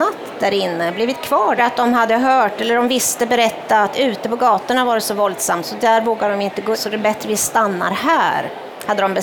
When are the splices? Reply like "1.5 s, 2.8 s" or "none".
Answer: 1.6 s, 6.7 s